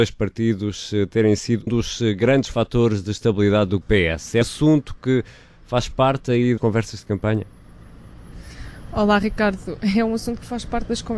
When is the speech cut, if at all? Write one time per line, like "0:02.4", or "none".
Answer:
0:01.7
0:03.8
0:04.4
0:06.6

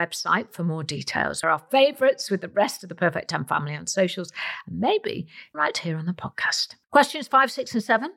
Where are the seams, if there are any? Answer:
0:01.4
0:05.5
0:06.8

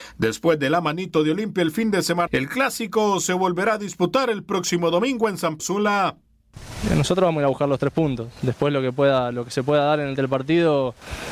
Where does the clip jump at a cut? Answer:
0:02.3
0:05.6
0:10.2

